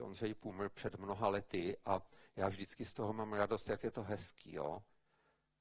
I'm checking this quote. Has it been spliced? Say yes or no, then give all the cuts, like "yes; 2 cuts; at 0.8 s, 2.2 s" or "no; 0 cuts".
no; 0 cuts